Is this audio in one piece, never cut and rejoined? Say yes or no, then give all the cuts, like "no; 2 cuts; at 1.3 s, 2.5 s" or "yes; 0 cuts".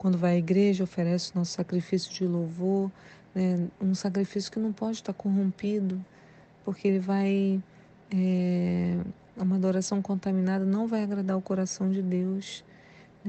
yes; 0 cuts